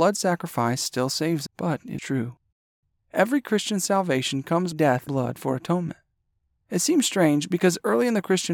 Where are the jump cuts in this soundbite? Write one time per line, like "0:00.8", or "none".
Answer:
0:01.5
0:02.0
0:04.7
0:05.1